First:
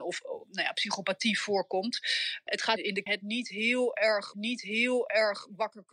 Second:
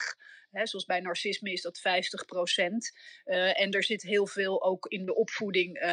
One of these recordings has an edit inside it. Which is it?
first; 3 cuts; at 2.8 s, 3.1 s, 4.3 s

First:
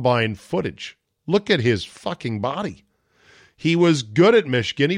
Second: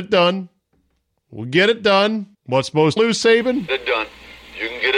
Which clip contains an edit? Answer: second; 3 cuts; at 2.3 s, 3.0 s, 3.7 s

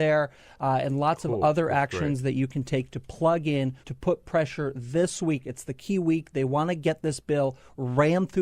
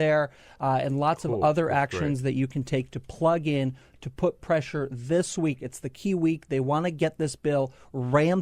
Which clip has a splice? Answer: first; 1 cut; at 3.8 s

